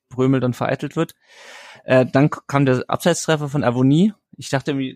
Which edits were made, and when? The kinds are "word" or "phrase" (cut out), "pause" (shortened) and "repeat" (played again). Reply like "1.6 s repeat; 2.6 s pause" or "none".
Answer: none